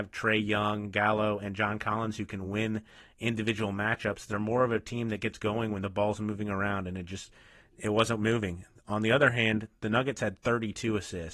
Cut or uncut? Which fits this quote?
uncut